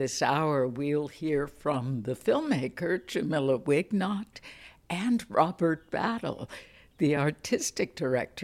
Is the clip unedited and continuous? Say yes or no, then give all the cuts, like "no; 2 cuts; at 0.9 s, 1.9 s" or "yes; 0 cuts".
yes; 0 cuts